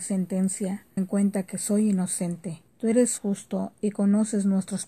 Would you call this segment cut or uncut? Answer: cut